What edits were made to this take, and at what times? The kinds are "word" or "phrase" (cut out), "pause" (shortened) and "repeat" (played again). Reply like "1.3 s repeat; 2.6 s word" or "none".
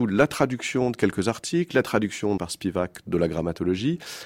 2.4 s word